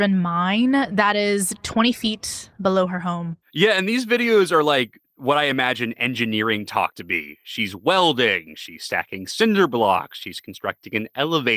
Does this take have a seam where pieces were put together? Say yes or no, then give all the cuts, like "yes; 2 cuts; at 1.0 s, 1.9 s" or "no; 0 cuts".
yes; 2 cuts; at 2.5 s, 3.4 s